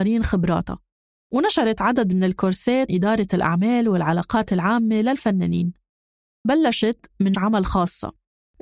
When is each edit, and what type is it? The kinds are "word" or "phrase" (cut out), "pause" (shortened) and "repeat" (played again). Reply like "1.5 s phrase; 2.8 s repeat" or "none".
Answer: 2.9 s word; 6.4 s word; 7.3 s word